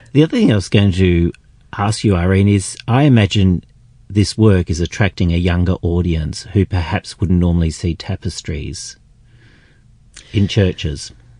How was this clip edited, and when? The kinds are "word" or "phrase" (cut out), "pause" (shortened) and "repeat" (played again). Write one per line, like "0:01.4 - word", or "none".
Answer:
none